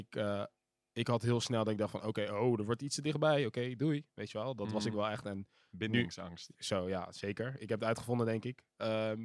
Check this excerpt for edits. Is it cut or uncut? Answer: uncut